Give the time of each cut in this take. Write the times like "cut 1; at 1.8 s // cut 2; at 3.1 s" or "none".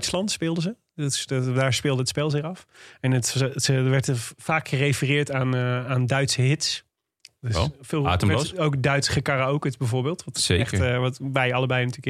none